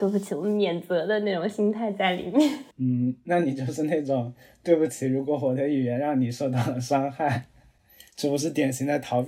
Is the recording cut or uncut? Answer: cut